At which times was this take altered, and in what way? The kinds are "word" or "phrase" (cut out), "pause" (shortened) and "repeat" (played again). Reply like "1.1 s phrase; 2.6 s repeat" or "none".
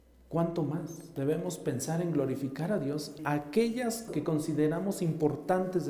3.2 s word; 4.1 s word